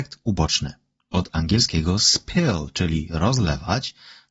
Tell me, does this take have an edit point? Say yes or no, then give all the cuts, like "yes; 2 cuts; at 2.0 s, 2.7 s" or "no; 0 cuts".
no; 0 cuts